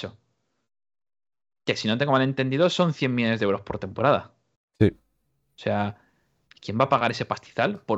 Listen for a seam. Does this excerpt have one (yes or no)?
no